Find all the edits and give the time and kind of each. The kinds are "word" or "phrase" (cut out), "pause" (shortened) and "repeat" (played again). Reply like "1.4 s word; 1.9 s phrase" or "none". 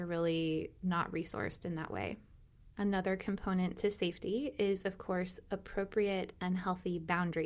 none